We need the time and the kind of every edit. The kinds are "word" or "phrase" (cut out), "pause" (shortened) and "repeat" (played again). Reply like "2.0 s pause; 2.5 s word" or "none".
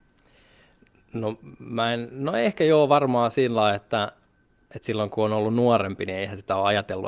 none